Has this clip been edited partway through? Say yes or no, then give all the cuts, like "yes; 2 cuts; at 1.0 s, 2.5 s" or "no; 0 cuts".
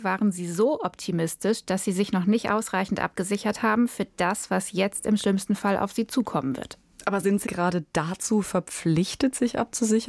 yes; 1 cut; at 7.5 s